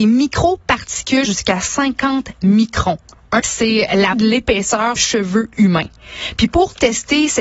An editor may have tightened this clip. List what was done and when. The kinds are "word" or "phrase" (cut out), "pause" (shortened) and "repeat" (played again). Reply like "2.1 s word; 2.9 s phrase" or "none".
1.2 s word; 3.4 s word; 4.1 s word; 5.0 s word

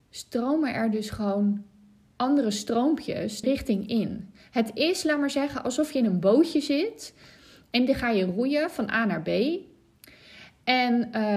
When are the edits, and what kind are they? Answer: 3.4 s phrase

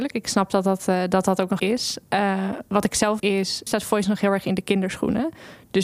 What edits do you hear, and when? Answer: 1.6 s word; 3.2 s word; 3.7 s word

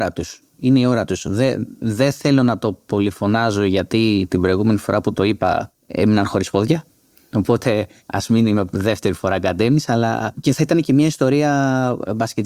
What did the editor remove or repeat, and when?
none

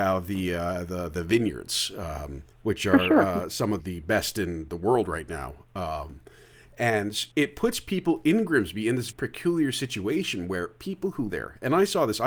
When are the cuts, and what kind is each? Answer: 2.5 s pause; 3.8 s word; 7.3 s pause; 9.1 s word; 11.3 s word

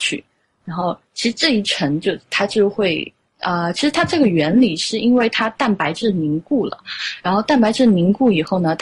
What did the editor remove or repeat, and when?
3.3 s pause

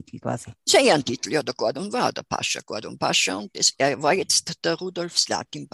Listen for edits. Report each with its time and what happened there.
none

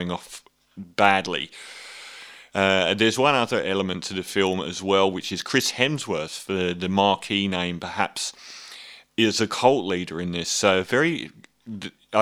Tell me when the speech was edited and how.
none

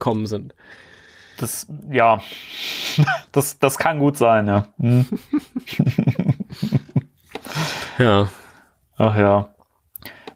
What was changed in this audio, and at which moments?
none

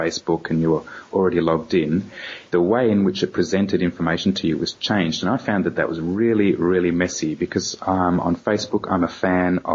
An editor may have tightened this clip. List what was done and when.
2.5 s pause

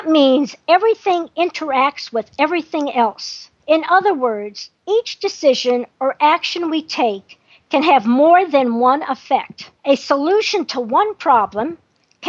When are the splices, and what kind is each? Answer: 3.6 s pause; 9.8 s pause

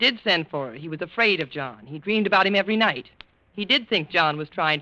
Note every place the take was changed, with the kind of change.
none

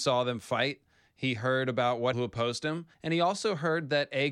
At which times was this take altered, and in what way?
2.1 s phrase; 2.9 s pause

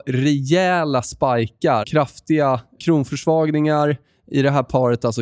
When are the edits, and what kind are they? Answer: 1.8 s word; 2.8 s word

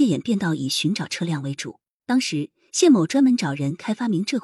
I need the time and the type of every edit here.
2.0 s pause

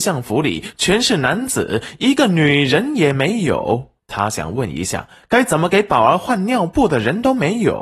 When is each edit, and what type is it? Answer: 4.0 s pause

